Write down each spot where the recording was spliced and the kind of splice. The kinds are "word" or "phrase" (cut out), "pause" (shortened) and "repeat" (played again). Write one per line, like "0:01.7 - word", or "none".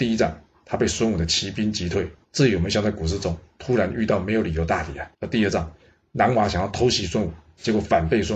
0:02.2 - pause
0:05.1 - pause